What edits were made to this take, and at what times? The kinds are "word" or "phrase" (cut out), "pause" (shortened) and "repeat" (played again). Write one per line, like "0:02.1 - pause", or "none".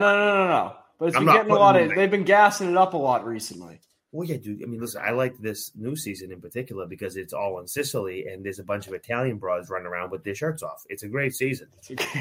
none